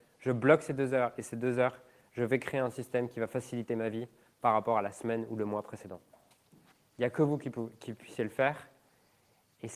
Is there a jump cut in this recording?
no; 0 cuts

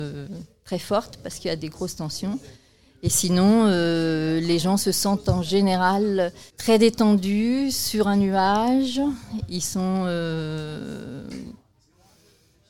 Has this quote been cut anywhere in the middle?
yes; 1 cut; at 6.5 s

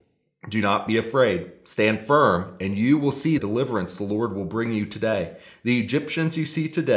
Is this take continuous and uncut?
no; 1 cut; at 3.4 s

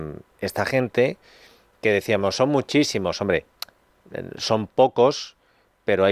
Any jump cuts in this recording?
no; 0 cuts

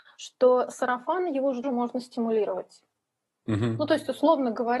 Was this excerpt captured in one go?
no; 1 cut; at 1.6 s

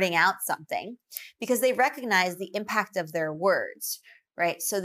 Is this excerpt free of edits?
yes; 0 cuts

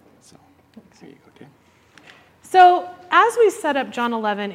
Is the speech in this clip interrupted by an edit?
yes; 1 cut; at 2.3 s

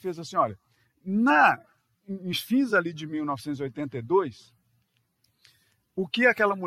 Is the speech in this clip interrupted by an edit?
no; 0 cuts

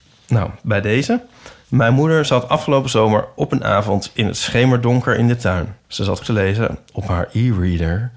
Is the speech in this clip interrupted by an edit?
yes; 2 cuts; at 5.8 s, 6.2 s

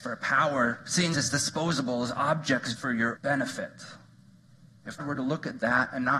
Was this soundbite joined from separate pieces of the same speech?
yes; 4 cuts; at 1.1 s, 2.8 s, 3.2 s, 5.0 s

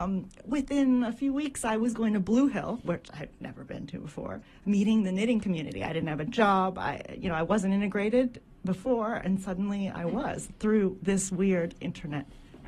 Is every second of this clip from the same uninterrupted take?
yes; 0 cuts

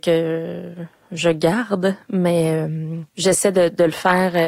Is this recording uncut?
no; 1 cut; at 3.1 s

